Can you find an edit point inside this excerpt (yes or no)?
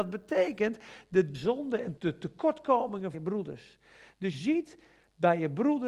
yes